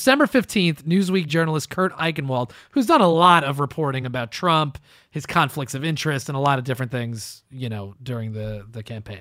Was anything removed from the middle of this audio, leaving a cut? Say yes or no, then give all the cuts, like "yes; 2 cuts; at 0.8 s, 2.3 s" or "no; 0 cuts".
no; 0 cuts